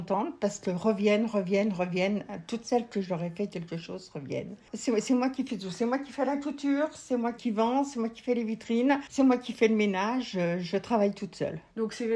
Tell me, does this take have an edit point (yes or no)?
yes